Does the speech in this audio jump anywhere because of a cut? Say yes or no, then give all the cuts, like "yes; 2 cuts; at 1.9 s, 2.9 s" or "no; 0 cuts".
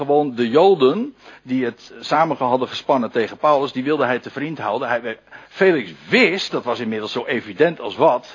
yes; 1 cut; at 5.5 s